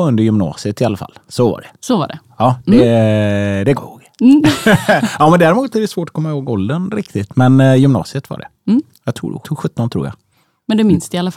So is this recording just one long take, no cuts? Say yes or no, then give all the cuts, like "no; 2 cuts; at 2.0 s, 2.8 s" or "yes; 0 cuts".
no; 2 cuts; at 3.7 s, 9.4 s